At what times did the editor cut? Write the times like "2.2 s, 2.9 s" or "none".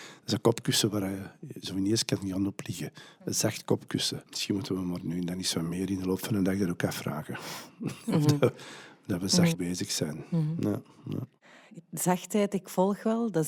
4.3 s, 9.5 s